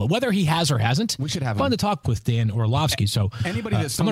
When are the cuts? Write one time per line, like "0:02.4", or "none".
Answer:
0:01.6
0:02.0